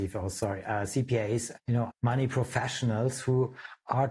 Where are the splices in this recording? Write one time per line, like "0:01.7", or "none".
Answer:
0:01.6
0:01.9

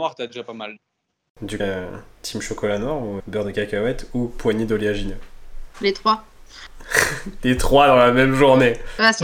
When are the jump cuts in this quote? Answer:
0:01.6
0:03.2

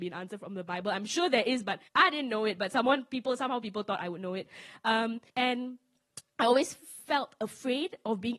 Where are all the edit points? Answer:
0:01.9
0:05.3

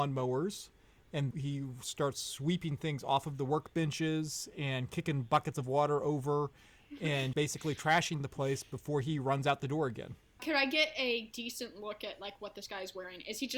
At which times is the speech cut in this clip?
0:01.3
0:07.3
0:10.4

